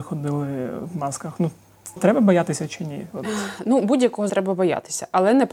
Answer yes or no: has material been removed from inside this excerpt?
yes